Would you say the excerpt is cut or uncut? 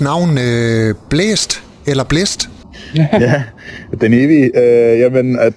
uncut